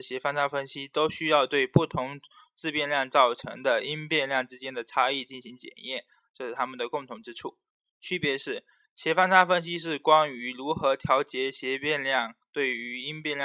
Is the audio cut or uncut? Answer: uncut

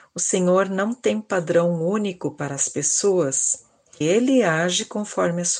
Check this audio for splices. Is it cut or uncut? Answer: cut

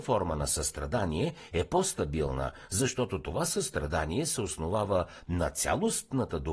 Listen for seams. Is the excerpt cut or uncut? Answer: uncut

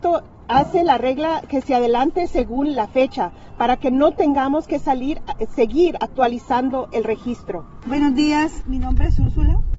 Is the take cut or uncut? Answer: uncut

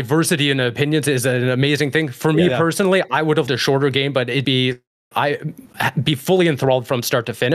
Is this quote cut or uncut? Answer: cut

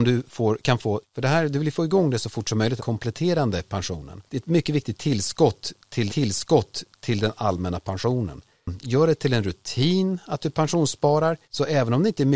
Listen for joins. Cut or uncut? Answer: cut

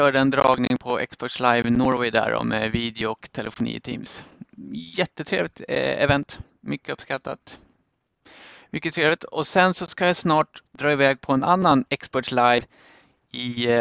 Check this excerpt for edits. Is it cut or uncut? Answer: cut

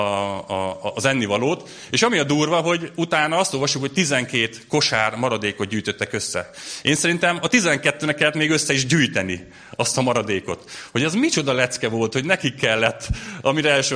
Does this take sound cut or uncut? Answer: uncut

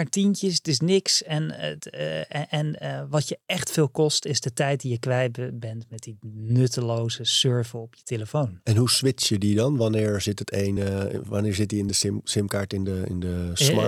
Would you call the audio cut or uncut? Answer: uncut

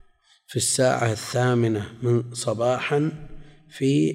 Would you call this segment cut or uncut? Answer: uncut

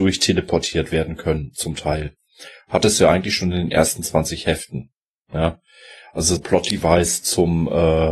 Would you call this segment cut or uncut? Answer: cut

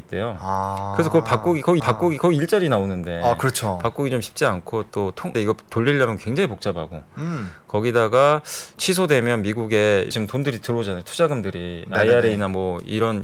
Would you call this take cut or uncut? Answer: cut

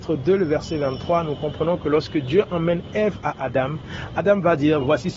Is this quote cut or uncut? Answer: uncut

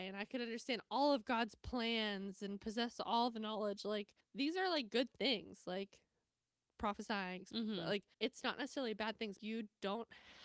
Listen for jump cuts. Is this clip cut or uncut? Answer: cut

